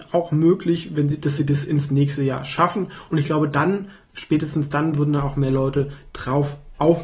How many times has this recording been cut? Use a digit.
0